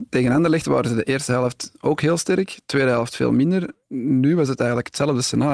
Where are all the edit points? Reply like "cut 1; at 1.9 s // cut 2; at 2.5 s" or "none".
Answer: none